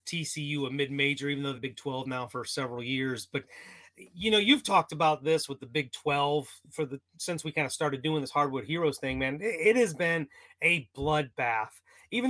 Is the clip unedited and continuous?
no; 1 cut; at 1.5 s

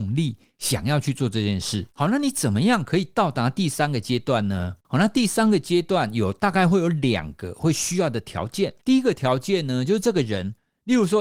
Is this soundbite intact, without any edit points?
no; 3 cuts; at 1.9 s, 4.8 s, 8.8 s

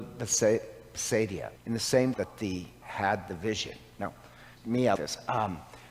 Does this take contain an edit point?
yes; 5 cuts; at 1.6 s, 2.1 s, 2.8 s, 4.6 s, 4.9 s

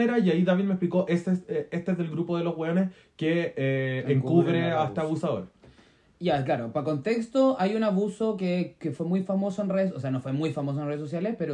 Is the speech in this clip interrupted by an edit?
no; 0 cuts

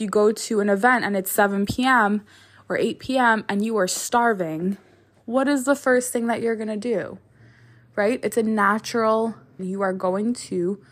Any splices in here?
yes; 1 cut; at 9.6 s

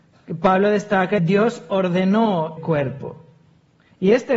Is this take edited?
yes; 2 cuts; at 1.2 s, 2.6 s

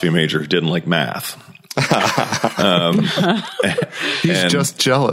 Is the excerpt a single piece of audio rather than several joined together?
yes; 0 cuts

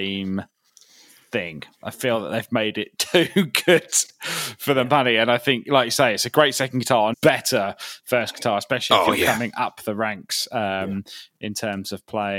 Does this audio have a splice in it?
yes; 1 cut; at 7.1 s

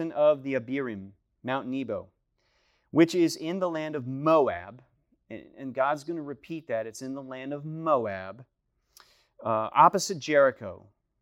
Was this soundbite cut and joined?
no; 0 cuts

